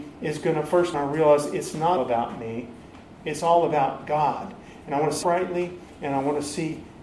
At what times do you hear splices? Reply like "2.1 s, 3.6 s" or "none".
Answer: 0.9 s, 2.0 s, 5.2 s